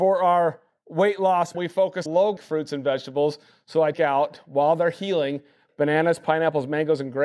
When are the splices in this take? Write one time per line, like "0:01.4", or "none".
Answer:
0:01.5
0:02.1
0:02.4
0:03.9